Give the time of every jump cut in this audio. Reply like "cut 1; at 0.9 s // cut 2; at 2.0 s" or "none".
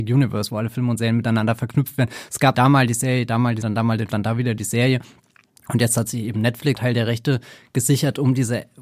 cut 1; at 2.5 s // cut 2; at 3.6 s // cut 3; at 4.1 s // cut 4; at 6.8 s

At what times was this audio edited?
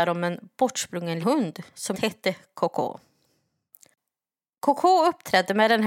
cut 1; at 1.2 s // cut 2; at 1.9 s

